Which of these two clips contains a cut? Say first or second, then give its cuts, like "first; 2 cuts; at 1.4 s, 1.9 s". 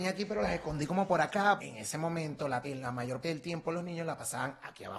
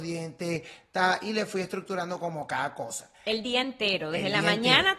first; 3 cuts; at 1.6 s, 2.6 s, 3.2 s